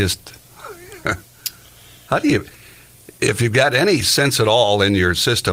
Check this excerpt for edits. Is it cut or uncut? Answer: uncut